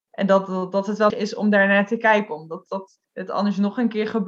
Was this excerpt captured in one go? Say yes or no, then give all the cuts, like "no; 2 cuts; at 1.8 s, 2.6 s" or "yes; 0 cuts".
no; 3 cuts; at 1.1 s, 2.7 s, 3.0 s